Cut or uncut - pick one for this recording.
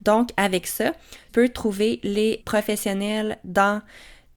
cut